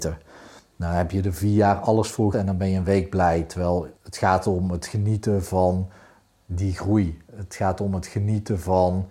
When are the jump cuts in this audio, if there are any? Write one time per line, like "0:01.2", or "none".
0:02.3
0:04.0
0:07.3